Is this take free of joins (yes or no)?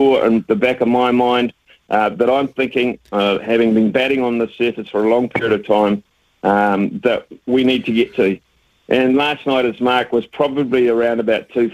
yes